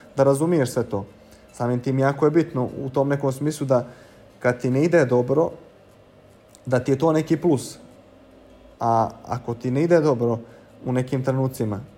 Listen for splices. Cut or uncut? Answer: uncut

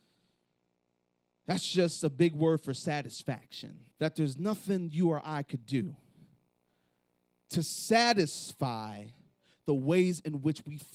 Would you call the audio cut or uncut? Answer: cut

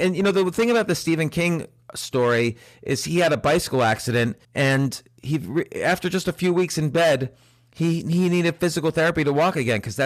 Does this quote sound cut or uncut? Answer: cut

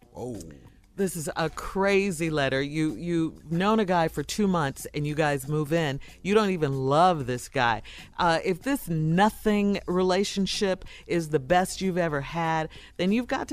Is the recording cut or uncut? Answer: uncut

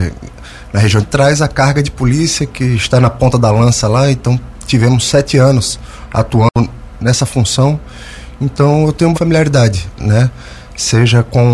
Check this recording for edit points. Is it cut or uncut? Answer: cut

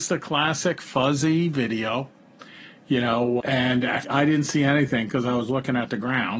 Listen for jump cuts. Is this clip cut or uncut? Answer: cut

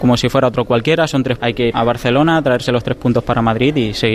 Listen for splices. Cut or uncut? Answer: cut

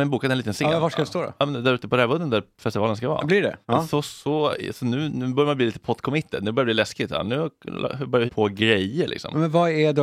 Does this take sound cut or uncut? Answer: cut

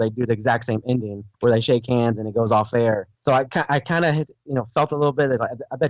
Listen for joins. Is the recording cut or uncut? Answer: cut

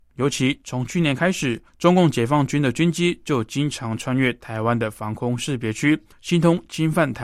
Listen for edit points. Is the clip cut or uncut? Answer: cut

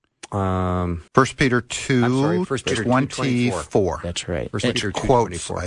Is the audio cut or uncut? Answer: cut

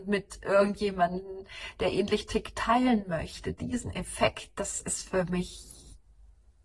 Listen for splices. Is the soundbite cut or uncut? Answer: uncut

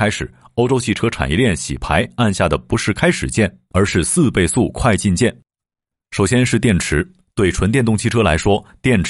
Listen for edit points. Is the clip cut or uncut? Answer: uncut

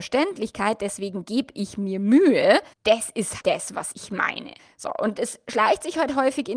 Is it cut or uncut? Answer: cut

